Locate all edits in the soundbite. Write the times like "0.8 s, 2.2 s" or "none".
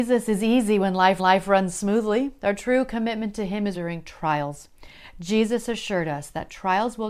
1.2 s, 3.7 s